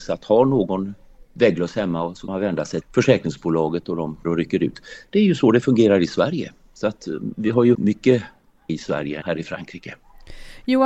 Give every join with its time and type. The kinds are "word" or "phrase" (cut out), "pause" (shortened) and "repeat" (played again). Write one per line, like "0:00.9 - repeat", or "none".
0:02.3 - word
0:02.8 - word
0:04.2 - word
0:07.7 - word
0:08.7 - word
0:09.2 - word